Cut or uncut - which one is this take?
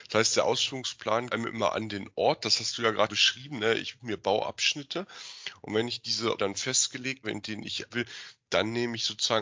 cut